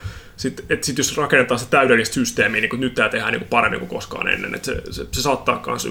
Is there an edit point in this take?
no; 0 cuts

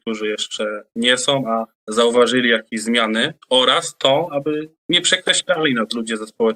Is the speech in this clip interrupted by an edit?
yes; 3 cuts; at 1.8 s, 3.4 s, 4.8 s

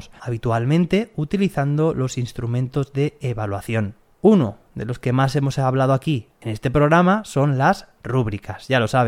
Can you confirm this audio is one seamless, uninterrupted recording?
no; 1 cut; at 4.6 s

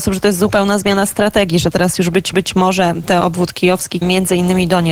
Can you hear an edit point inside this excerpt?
yes; 3 cuts; at 2.3 s, 3.2 s, 4.0 s

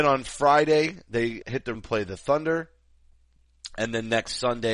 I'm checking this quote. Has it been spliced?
yes; 2 cuts; at 1.4 s, 1.7 s

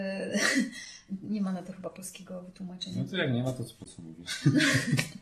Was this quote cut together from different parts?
no; 0 cuts

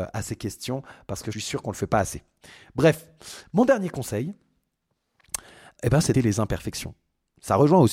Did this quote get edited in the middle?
yes; 3 cuts; at 1.3 s, 5.8 s, 6.1 s

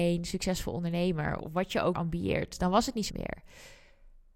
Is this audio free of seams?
no; 3 cuts; at 1.4 s, 1.9 s, 3.1 s

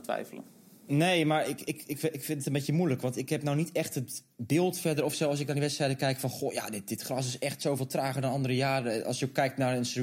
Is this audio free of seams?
yes; 0 cuts

